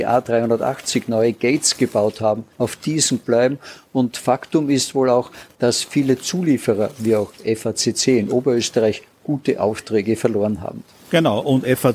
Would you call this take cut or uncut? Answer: cut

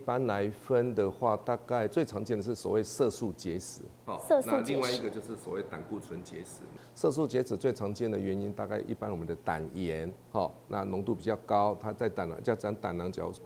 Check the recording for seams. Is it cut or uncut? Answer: uncut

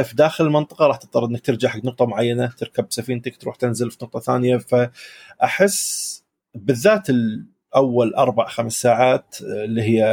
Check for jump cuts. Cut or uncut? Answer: uncut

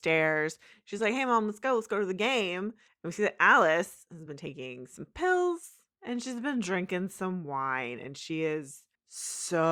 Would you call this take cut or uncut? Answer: uncut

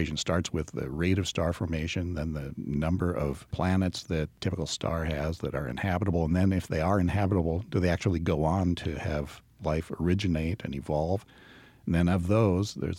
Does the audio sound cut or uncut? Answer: uncut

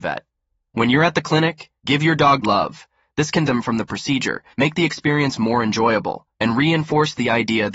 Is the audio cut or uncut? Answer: cut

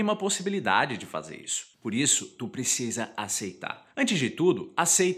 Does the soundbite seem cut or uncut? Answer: cut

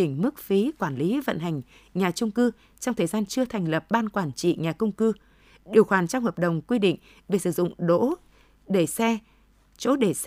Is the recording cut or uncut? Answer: uncut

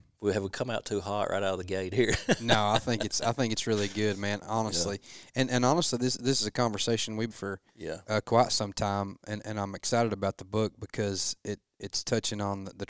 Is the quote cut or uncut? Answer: cut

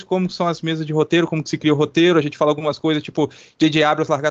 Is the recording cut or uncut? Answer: uncut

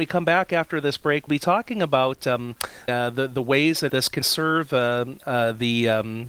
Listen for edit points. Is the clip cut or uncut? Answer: cut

